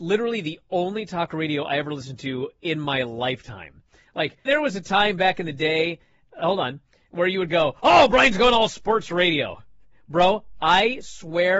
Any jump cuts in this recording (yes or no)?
yes